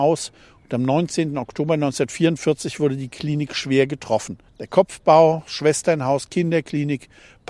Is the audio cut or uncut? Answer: cut